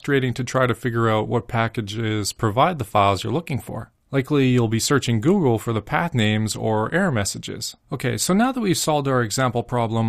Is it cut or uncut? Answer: cut